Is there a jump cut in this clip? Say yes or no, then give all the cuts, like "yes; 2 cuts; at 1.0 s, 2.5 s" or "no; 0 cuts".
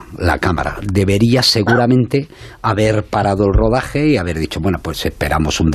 no; 0 cuts